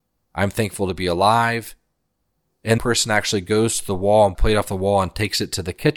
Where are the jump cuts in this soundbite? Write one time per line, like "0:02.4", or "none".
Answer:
0:02.8
0:04.3